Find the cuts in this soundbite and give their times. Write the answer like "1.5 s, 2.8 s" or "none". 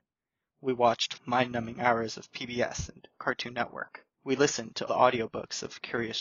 1.2 s, 4.1 s, 4.9 s